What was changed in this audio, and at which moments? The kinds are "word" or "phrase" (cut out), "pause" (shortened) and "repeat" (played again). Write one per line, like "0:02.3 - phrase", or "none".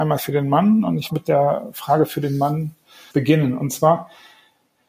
0:01.1 - word
0:03.1 - word